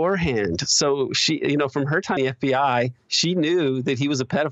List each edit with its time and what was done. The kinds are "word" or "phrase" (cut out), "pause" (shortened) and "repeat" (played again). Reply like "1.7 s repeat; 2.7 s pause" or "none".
2.2 s word